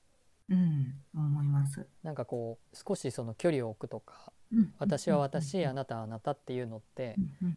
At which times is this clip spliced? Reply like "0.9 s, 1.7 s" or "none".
2.0 s, 2.7 s